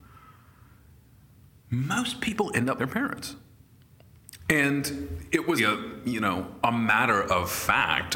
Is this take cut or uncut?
cut